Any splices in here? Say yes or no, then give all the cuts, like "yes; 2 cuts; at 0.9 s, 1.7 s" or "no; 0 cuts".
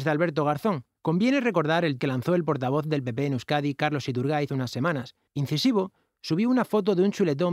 yes; 4 cuts; at 1.0 s, 2.0 s, 4.5 s, 5.3 s